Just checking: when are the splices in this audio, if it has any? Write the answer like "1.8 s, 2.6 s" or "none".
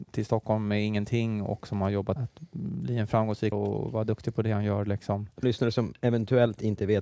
2.2 s, 3.5 s, 5.4 s